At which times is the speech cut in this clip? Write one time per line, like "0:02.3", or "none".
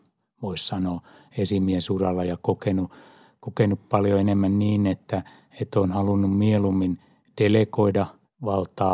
none